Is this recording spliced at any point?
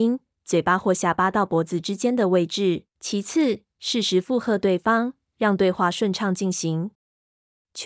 yes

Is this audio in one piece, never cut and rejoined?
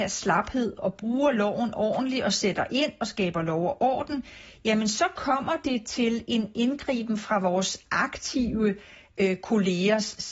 yes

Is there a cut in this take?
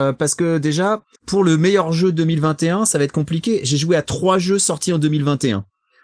yes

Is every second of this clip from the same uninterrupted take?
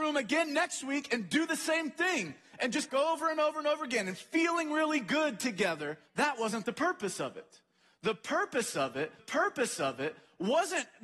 no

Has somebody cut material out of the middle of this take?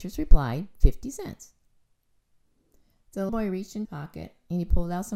yes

